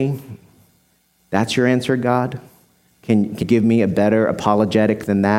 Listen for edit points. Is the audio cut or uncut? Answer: cut